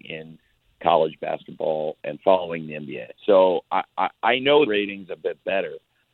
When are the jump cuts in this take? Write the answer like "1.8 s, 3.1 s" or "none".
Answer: 2.0 s, 3.2 s, 3.9 s, 4.7 s